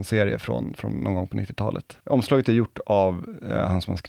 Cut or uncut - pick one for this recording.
cut